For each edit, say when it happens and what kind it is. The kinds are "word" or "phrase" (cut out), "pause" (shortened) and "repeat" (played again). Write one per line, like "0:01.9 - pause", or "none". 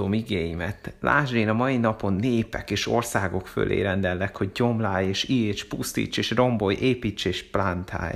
none